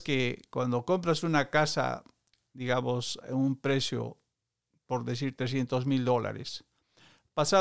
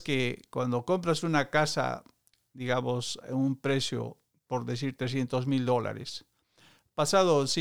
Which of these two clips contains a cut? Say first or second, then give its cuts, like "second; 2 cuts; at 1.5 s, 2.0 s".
second; 1 cut; at 4.3 s